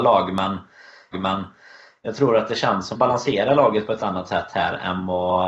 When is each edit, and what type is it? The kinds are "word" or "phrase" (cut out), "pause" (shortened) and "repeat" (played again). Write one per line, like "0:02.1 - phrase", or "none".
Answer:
0:01.1 - repeat
0:02.9 - phrase
0:04.0 - word